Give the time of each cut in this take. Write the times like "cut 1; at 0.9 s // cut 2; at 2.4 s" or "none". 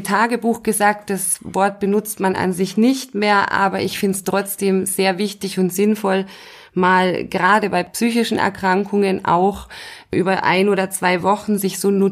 none